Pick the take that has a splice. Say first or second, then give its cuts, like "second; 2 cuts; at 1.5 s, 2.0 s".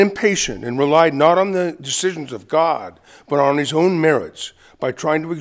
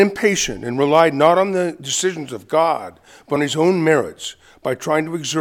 second; 1 cut; at 3.4 s